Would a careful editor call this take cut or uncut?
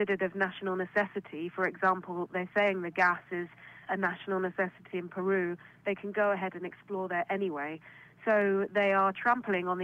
cut